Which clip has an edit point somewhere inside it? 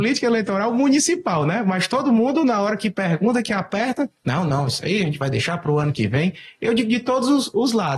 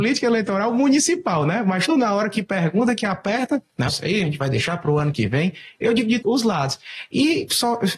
second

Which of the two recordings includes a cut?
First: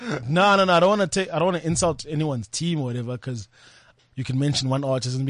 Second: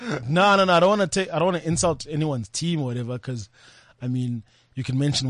first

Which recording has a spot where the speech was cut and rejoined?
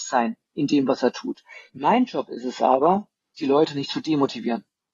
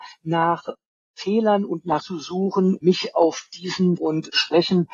second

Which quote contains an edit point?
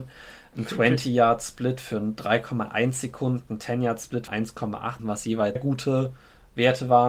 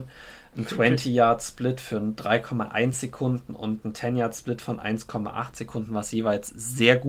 first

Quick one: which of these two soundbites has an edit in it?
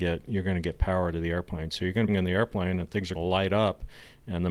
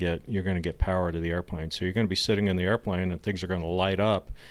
first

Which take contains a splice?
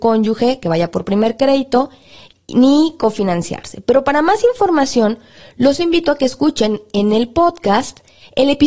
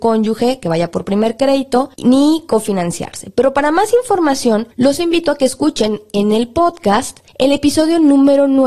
second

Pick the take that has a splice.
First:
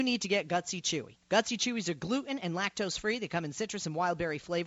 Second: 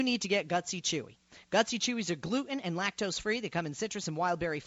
first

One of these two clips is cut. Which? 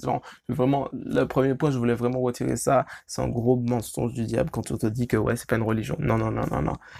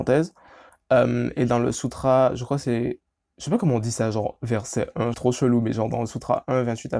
second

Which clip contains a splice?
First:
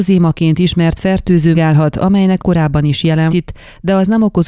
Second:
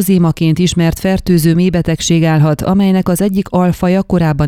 first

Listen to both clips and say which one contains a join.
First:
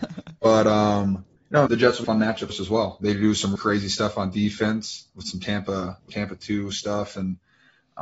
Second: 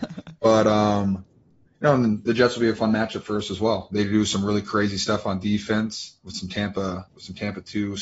first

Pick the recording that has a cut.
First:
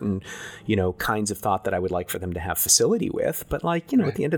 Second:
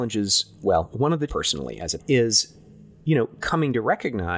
second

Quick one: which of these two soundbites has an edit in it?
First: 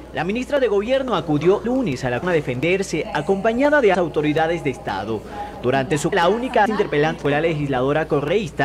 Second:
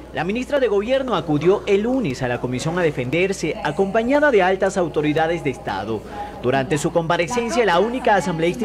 first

